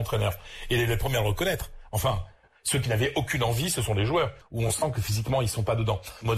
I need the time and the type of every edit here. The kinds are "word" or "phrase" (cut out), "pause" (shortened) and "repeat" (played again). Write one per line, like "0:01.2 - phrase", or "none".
none

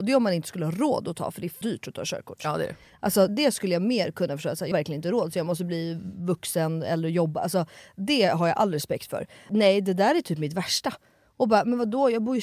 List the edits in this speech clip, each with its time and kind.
0:01.6 - word
0:03.3 - word
0:04.7 - word

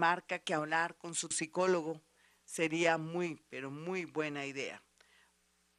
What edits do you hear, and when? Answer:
0:01.3 - phrase

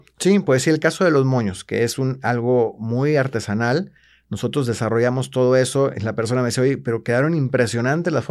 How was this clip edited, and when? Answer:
none

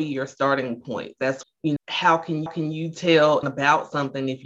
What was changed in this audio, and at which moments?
0:01.4 - word
0:01.8 - word
0:02.5 - repeat
0:03.4 - word

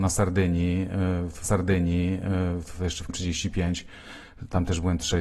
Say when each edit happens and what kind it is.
0:01.4 - repeat
0:03.1 - word

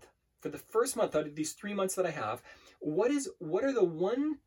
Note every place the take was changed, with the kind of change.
none

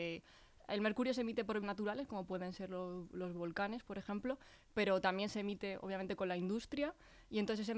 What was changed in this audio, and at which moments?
0:01.6 - word

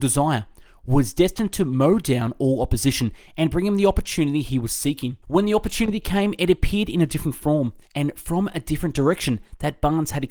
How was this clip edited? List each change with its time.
0:05.2 - pause
0:07.8 - pause

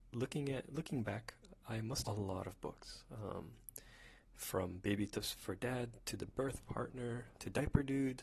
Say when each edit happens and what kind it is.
0:02.0 - phrase

